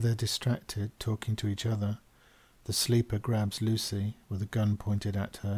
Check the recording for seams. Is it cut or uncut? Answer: uncut